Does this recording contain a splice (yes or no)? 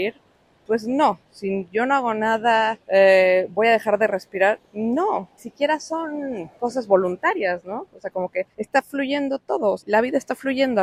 yes